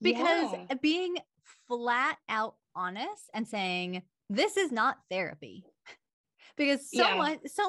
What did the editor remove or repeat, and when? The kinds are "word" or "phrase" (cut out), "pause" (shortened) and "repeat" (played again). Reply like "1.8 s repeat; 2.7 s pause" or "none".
2.6 s pause; 4.1 s pause